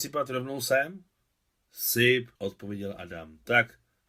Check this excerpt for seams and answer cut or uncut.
cut